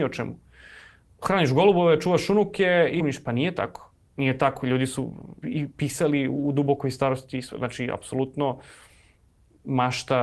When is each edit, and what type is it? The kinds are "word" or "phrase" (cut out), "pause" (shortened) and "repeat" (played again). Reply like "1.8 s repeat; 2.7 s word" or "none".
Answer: 3.0 s word; 4.0 s pause; 5.4 s word